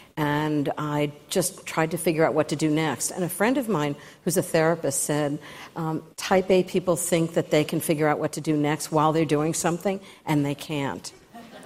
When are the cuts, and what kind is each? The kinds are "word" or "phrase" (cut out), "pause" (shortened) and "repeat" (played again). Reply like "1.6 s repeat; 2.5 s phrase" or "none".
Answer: 6.1 s pause